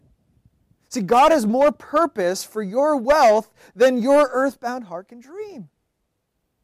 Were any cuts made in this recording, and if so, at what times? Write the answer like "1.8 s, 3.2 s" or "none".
none